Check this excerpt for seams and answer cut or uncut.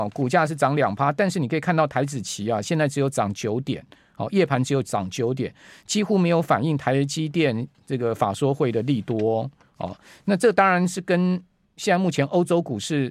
uncut